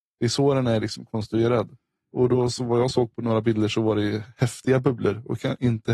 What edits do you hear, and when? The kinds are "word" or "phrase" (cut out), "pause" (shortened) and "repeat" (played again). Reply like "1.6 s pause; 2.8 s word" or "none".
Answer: none